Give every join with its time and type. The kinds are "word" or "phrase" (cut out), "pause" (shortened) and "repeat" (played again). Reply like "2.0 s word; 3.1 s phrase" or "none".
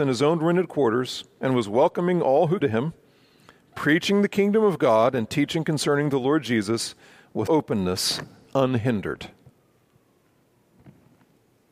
2.6 s word; 7.5 s word